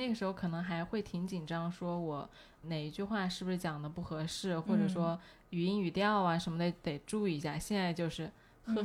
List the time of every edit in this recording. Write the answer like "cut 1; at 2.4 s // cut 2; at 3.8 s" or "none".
cut 1; at 2.6 s